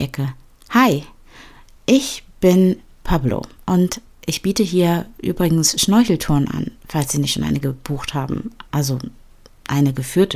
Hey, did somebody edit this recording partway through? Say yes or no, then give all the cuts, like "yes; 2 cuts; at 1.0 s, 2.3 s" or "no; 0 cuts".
yes; 1 cut; at 8.7 s